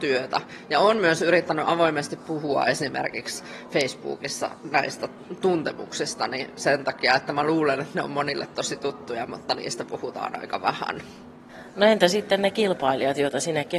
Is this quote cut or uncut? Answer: uncut